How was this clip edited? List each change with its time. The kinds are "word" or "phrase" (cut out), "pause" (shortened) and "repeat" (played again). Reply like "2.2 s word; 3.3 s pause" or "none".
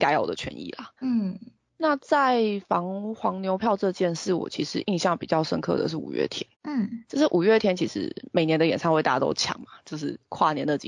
1.0 s pause; 6.5 s pause